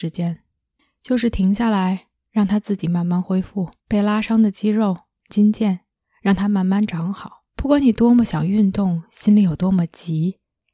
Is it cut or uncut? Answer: cut